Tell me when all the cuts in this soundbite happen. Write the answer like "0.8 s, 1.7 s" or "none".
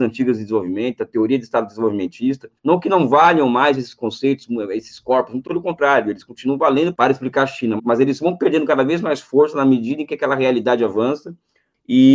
2.6 s, 5.5 s, 7.8 s